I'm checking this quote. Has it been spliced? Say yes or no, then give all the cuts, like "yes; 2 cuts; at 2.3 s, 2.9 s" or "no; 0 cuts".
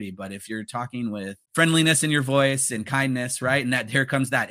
yes; 1 cut; at 1.4 s